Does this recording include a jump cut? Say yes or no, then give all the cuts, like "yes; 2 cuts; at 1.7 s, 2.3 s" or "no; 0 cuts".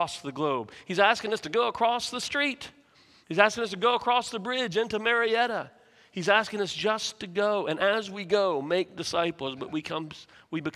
no; 0 cuts